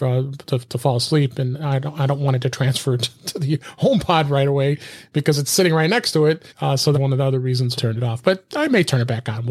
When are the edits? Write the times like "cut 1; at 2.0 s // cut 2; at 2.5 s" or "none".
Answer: cut 1; at 6.5 s // cut 2; at 6.9 s // cut 3; at 7.8 s